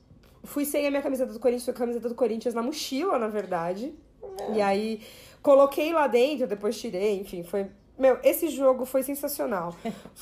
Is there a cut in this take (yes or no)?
no